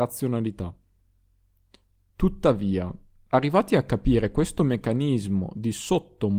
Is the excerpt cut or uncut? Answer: uncut